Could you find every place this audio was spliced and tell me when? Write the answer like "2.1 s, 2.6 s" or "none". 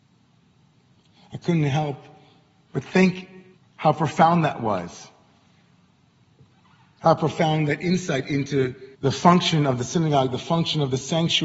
3.6 s, 8.9 s